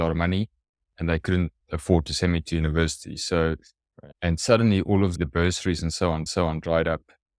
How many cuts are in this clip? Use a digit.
3